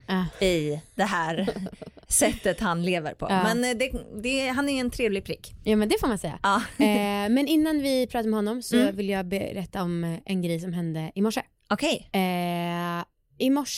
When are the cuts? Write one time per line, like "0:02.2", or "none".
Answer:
none